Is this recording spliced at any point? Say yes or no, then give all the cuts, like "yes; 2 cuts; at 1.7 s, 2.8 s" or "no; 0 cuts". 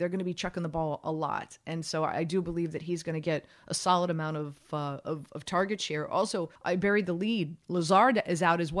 yes; 1 cut; at 6.6 s